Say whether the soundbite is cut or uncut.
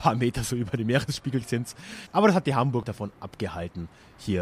cut